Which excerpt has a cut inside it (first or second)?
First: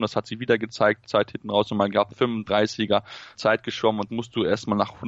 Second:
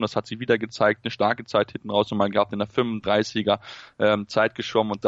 first